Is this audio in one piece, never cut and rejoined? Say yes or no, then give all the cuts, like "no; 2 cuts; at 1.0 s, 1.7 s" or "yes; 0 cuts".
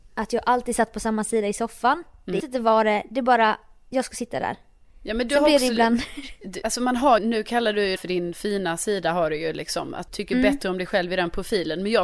no; 6 cuts; at 2.4 s, 6.6 s, 7.2 s, 8.0 s, 8.3 s, 10.1 s